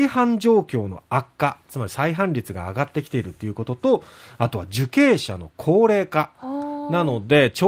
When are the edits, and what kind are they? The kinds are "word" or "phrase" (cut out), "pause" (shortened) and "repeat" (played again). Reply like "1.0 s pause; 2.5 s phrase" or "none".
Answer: none